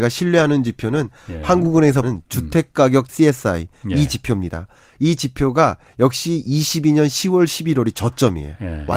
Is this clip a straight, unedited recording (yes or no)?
no